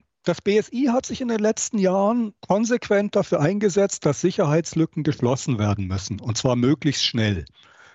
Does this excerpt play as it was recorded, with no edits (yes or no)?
no